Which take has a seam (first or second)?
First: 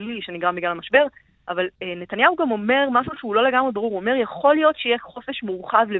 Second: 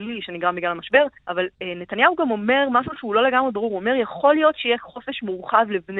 second